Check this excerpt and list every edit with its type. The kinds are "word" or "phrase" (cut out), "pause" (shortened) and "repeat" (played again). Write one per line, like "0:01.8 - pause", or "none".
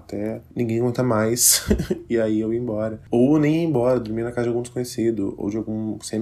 none